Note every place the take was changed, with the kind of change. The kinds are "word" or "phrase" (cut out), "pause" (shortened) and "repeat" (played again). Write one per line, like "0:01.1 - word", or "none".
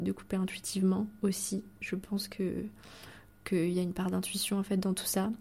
none